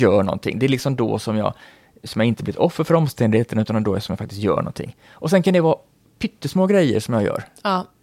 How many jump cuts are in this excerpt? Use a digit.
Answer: 0